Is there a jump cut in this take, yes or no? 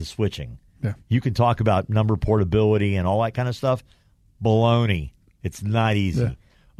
no